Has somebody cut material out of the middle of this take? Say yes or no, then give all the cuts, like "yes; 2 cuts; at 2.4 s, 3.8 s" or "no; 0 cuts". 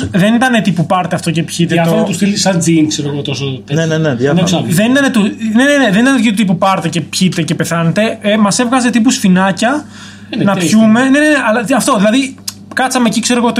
no; 0 cuts